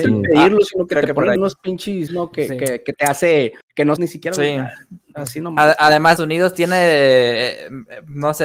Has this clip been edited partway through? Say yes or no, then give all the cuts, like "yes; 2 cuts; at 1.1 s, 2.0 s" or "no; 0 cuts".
yes; 5 cuts; at 1.4 s, 2.1 s, 3.6 s, 4.0 s, 6.2 s